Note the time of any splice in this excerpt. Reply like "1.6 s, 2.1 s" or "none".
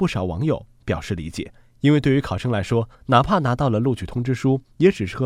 1.6 s, 2.9 s